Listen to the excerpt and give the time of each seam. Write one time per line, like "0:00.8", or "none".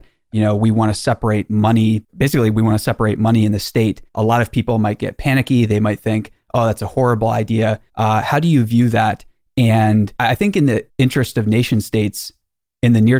0:02.1
0:04.1
0:07.9
0:10.2
0:10.9